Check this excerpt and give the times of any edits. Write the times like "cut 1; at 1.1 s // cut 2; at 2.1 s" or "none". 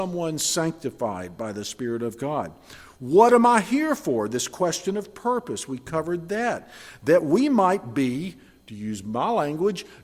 none